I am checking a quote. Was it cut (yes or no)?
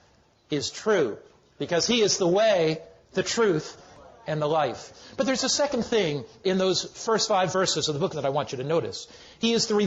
yes